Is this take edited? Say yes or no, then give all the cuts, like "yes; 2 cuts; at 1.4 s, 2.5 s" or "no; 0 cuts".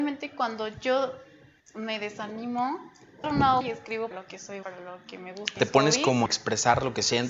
yes; 6 cuts; at 3.2 s, 3.6 s, 4.1 s, 4.6 s, 5.6 s, 6.3 s